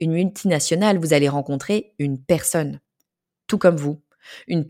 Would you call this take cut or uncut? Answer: uncut